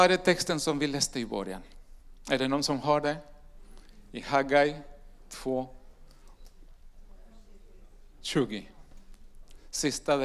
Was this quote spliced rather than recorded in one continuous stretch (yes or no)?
no